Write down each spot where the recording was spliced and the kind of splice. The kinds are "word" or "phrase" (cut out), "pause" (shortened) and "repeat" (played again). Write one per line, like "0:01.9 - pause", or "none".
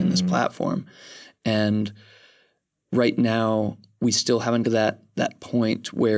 0:04.6 - phrase

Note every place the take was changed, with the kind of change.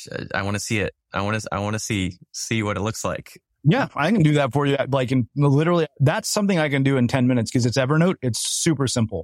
0:03.5 - pause

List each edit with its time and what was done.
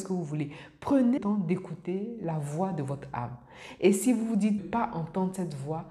0:01.2 - word
0:04.6 - word

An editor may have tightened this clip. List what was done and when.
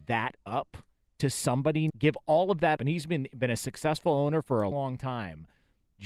0:01.9 - word
0:02.8 - word
0:04.7 - word

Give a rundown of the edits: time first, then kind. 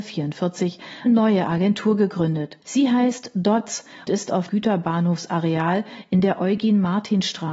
0:01.1 - word
0:02.6 - pause
0:04.1 - word
0:04.5 - word

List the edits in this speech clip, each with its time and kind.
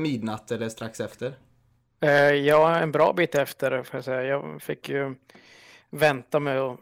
none

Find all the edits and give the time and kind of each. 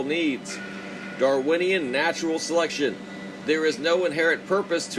none

